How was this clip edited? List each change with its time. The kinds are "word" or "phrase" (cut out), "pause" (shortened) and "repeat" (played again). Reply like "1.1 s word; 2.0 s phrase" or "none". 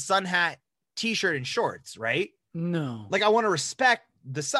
none